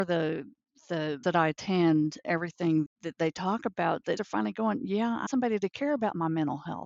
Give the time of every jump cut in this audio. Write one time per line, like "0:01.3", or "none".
0:01.2
0:02.2
0:02.9
0:04.2
0:05.3